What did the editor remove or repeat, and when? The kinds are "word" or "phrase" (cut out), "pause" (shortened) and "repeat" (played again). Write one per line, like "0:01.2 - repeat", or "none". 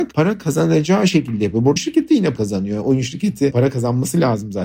0:01.8 - word
0:02.4 - word
0:03.5 - word

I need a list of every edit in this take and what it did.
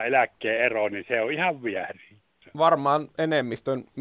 none

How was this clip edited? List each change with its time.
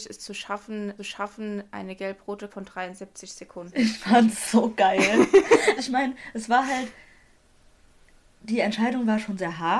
0:01.0 - repeat
0:02.5 - phrase
0:05.8 - word

